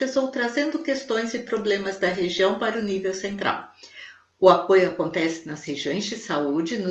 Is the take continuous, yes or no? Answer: yes